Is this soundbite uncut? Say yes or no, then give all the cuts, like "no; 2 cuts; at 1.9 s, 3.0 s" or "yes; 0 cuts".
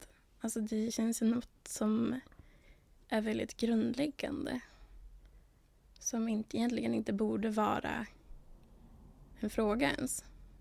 yes; 0 cuts